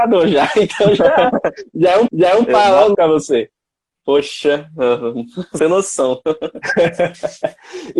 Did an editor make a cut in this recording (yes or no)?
yes